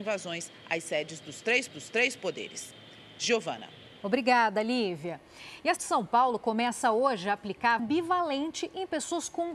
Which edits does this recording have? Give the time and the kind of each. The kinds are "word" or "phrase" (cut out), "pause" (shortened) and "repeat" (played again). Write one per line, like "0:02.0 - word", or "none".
0:01.7 - repeat
0:05.8 - word
0:07.8 - word